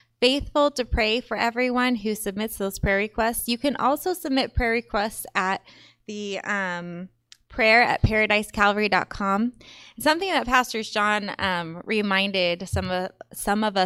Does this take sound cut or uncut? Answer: uncut